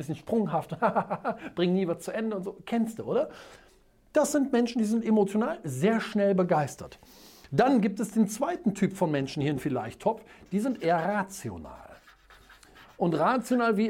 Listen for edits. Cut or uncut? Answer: cut